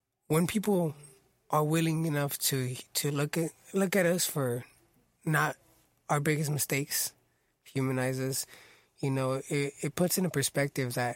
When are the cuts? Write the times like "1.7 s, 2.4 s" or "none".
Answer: none